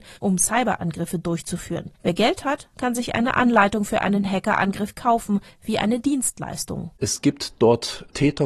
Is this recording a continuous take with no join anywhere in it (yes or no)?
no